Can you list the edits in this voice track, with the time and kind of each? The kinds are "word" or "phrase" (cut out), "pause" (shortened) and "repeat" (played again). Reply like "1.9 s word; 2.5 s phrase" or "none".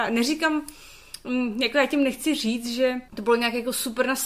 3.1 s pause